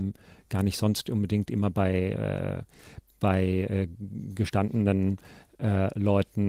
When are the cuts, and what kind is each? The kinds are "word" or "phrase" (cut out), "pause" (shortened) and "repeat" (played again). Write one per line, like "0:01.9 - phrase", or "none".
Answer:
none